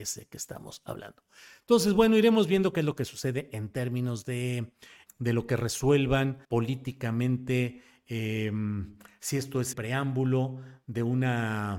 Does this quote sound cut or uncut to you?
cut